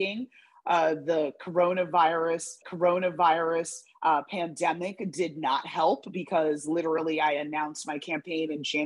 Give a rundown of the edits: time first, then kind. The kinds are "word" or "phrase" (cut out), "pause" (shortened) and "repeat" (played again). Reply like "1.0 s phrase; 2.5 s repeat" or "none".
2.6 s repeat